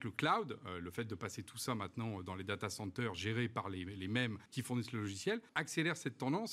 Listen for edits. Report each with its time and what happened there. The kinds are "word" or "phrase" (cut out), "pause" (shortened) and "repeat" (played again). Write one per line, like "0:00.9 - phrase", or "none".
0:04.5 - pause
0:05.5 - pause